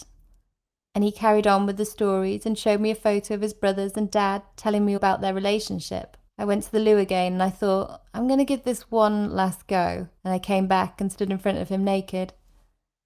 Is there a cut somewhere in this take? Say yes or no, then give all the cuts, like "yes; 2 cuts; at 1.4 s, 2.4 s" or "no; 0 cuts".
yes; 3 cuts; at 5.0 s, 6.3 s, 10.2 s